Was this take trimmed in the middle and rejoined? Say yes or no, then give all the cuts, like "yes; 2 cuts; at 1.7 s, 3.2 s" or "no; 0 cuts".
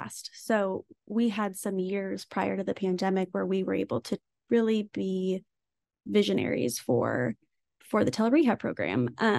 no; 0 cuts